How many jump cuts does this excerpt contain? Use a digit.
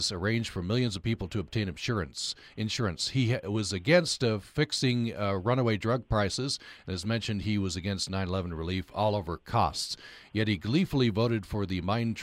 0